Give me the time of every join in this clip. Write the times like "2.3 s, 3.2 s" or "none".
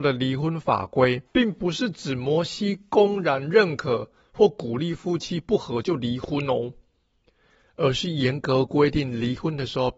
1.3 s